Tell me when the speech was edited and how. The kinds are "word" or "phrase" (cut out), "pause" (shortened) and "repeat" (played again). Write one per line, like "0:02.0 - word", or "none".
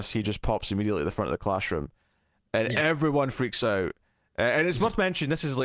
none